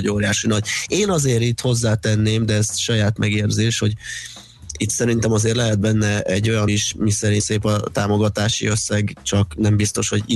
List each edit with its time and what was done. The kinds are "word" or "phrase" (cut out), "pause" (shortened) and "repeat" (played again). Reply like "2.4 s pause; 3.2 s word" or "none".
3.2 s word; 6.7 s word; 7.4 s word